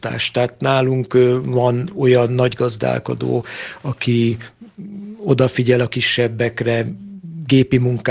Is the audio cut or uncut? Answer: uncut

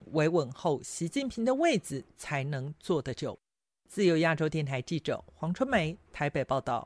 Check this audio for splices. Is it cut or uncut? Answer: uncut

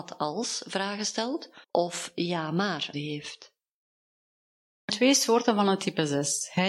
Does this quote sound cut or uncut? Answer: cut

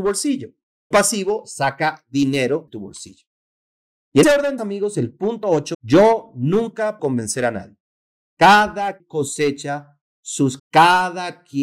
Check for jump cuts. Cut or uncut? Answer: cut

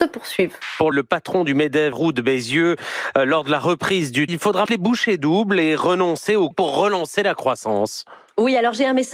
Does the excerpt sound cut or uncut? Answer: cut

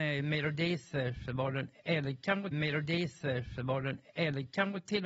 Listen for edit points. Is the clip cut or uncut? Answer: cut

